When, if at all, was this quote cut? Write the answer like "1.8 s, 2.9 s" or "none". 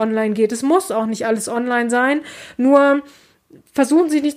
none